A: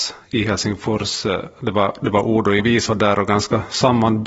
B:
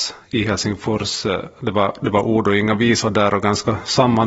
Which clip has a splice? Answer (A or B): A